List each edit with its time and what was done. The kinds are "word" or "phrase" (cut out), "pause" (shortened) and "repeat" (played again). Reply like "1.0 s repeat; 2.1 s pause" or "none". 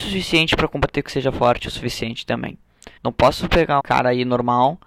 1.0 s phrase; 3.0 s pause; 3.8 s word